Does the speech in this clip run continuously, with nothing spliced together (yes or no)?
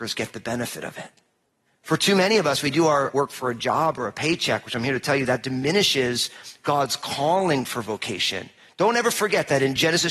yes